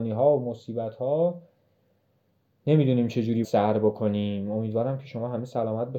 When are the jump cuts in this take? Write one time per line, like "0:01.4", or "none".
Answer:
0:03.4